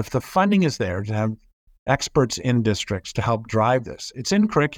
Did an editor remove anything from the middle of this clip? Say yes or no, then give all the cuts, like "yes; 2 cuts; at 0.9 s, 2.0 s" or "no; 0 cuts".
no; 0 cuts